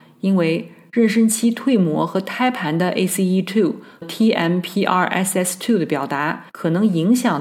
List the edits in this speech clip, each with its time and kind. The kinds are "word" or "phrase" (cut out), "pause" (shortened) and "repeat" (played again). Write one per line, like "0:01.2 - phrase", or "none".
0:04.0 - word
0:06.5 - pause